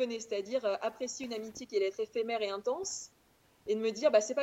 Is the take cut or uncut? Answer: uncut